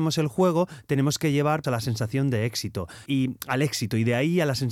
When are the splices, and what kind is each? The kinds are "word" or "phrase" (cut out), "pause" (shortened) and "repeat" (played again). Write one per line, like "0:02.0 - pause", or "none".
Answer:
0:01.6 - word
0:03.1 - word